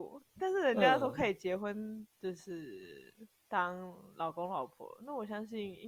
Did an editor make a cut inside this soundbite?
yes; 1 cut; at 2.1 s

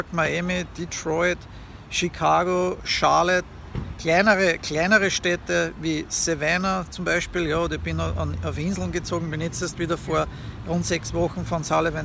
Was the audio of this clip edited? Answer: no; 0 cuts

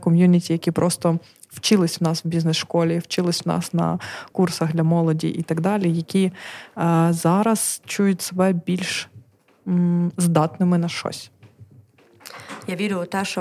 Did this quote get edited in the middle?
no; 0 cuts

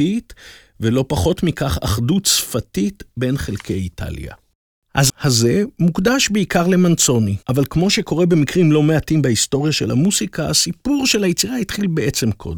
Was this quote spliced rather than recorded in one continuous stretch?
yes; 2 cuts; at 5.1 s, 7.4 s

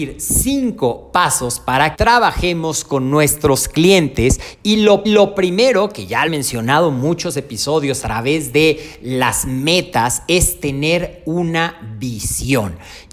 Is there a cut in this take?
yes; 4 cuts; at 1.9 s, 5.0 s, 6.3 s, 8.0 s

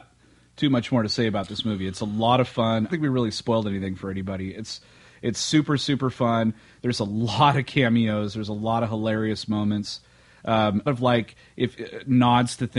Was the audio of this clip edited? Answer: yes; 2 cuts; at 2.9 s, 10.9 s

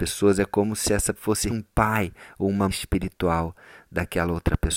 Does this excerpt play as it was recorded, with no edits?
no; 3 cuts; at 1.2 s, 1.5 s, 2.7 s

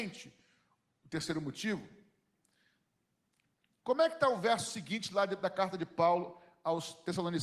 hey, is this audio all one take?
yes; 0 cuts

